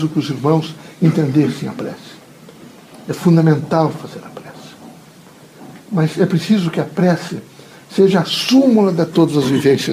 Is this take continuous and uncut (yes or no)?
yes